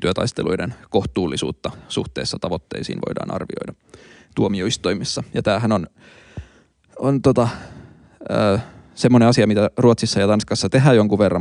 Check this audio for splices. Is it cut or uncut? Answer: uncut